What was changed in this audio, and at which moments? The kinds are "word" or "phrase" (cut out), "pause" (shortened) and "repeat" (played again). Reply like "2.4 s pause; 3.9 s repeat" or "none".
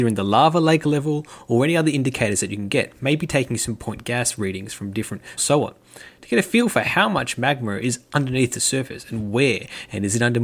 5.4 s phrase